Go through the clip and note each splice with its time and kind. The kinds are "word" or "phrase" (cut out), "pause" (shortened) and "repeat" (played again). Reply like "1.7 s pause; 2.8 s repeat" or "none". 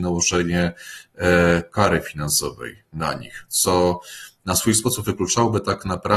none